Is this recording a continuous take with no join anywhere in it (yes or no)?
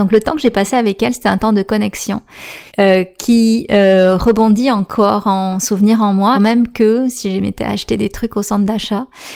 no